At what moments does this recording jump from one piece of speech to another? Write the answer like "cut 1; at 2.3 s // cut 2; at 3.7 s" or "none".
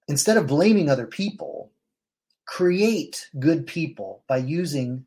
none